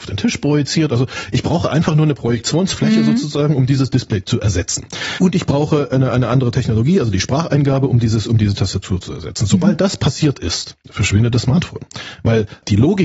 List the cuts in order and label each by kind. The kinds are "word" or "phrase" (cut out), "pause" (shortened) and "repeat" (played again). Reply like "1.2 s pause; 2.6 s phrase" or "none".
none